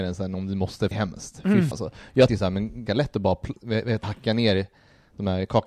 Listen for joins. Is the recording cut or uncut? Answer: cut